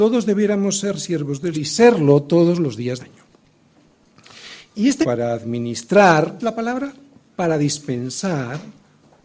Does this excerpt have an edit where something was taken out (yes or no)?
yes